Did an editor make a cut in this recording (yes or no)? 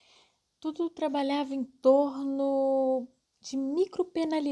no